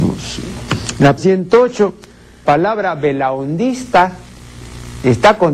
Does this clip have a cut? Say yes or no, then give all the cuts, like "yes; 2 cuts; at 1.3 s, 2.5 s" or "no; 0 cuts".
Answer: yes; 2 cuts; at 1.2 s, 2.5 s